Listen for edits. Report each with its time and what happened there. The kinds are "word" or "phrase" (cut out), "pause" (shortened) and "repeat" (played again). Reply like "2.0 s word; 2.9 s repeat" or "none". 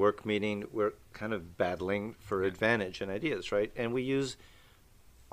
1.1 s word